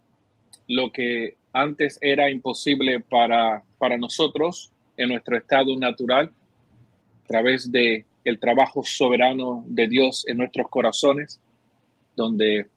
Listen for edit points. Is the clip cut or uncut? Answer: cut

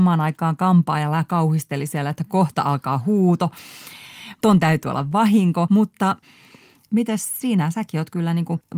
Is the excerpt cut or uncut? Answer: uncut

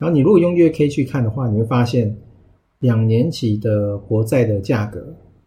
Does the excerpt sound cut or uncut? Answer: uncut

